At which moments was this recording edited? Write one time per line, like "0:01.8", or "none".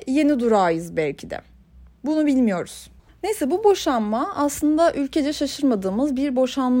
none